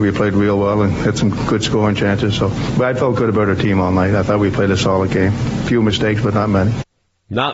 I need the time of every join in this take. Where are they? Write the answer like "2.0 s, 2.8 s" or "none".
none